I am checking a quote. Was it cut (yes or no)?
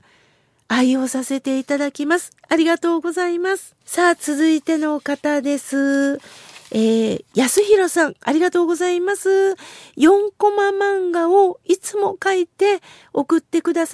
yes